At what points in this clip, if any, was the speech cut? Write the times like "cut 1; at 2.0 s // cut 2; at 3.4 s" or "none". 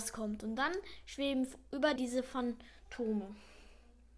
cut 1; at 2.0 s